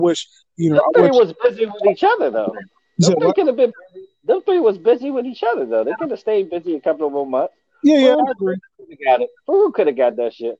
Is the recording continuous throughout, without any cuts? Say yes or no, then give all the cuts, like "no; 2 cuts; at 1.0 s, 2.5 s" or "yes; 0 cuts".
yes; 0 cuts